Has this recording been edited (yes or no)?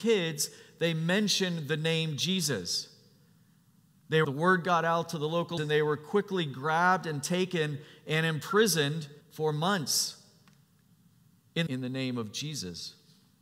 yes